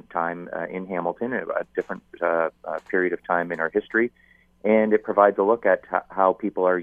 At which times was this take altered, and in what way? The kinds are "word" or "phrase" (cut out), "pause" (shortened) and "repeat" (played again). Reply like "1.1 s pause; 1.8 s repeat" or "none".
none